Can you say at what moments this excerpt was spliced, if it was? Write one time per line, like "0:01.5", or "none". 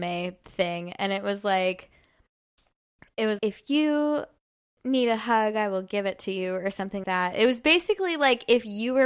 0:03.4
0:07.0